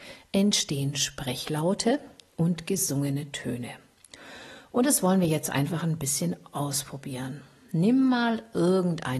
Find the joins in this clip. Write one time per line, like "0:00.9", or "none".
none